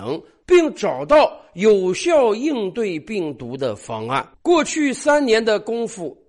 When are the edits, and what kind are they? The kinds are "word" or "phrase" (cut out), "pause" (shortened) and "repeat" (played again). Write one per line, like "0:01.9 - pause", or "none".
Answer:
0:04.3 - pause